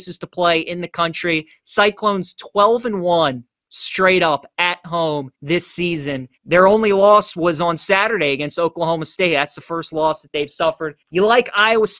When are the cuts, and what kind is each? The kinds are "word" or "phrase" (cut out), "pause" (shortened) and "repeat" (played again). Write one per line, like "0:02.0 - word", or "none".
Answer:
0:05.3 - pause
0:06.4 - pause
0:11.0 - pause